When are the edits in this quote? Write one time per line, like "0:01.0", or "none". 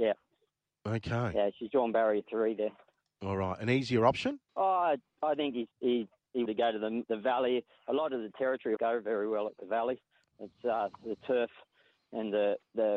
0:04.5
0:05.7
0:06.4
0:08.8